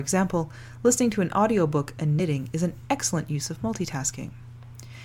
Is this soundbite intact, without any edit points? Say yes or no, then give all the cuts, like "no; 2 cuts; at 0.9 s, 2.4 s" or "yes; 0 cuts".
yes; 0 cuts